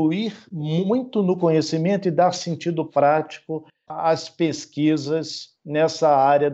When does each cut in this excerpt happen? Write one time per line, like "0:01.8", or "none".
none